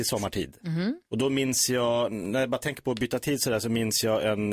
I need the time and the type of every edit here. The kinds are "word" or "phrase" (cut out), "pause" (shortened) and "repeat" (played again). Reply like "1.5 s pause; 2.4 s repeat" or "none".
1.0 s pause